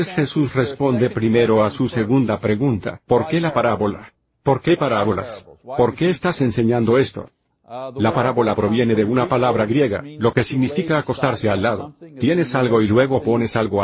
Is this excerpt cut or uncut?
cut